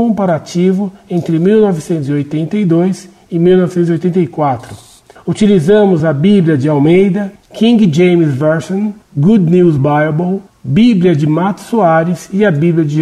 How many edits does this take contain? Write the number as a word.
zero